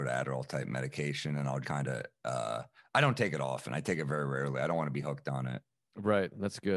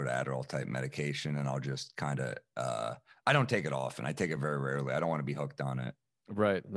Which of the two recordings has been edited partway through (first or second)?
first